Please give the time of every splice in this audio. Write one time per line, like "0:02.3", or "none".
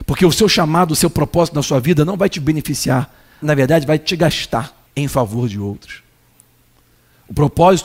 0:03.4
0:04.9